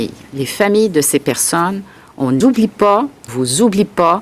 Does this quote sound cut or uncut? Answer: cut